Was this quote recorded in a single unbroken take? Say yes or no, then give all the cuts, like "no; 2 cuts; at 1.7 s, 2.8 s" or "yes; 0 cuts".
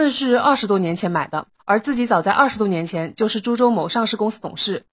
no; 1 cut; at 1.5 s